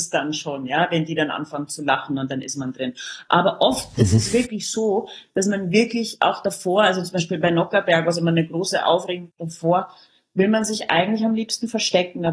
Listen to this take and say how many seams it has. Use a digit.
0